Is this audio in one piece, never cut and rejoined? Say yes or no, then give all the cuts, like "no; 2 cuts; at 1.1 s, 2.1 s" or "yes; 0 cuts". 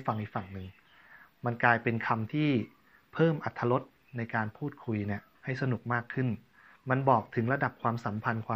yes; 0 cuts